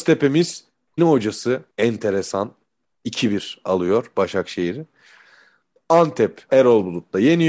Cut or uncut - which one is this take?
cut